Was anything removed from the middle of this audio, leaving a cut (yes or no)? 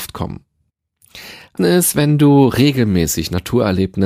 yes